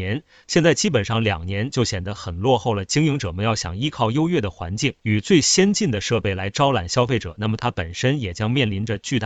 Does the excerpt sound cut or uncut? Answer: cut